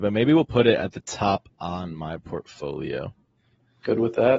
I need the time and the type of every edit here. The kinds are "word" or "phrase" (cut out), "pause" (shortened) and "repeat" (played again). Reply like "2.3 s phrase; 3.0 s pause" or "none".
1.5 s word